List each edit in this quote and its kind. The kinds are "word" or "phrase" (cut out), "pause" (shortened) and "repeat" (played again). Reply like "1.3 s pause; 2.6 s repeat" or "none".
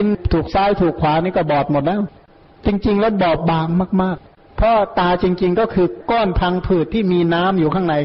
4.5 s word